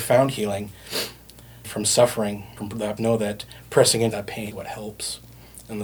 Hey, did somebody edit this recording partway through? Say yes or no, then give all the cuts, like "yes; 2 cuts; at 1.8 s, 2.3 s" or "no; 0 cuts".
yes; 5 cuts; at 1.6 s, 2.6 s, 3.0 s, 4.1 s, 4.5 s